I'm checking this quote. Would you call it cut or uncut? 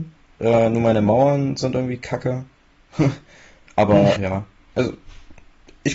cut